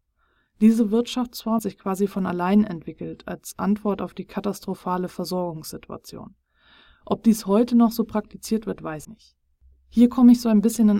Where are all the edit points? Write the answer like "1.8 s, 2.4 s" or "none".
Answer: 1.6 s, 9.0 s